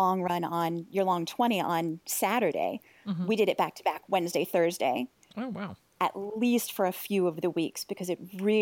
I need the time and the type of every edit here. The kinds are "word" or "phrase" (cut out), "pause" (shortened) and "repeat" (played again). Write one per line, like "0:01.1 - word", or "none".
none